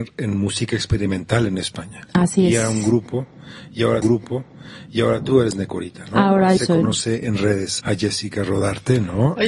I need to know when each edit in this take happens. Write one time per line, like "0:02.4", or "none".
0:04.0
0:06.6
0:07.8